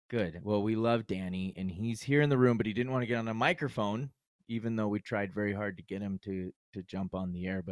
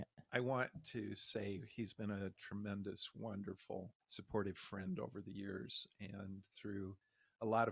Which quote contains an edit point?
second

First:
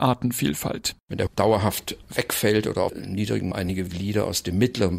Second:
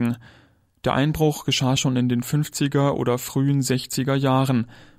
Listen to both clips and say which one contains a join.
first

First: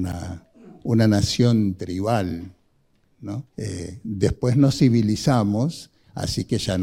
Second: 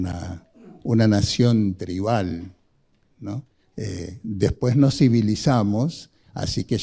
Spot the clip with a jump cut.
first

